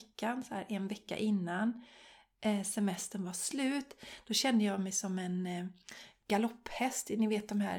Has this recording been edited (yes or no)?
no